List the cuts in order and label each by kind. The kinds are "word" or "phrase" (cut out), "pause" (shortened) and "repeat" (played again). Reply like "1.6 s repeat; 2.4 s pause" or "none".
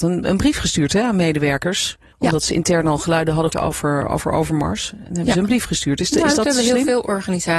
2.1 s pause; 3.5 s word